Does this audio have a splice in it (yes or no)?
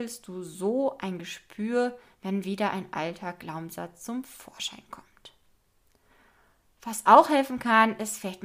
no